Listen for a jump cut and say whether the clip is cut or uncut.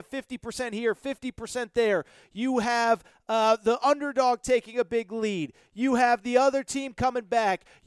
uncut